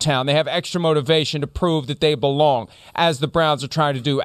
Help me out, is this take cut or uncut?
uncut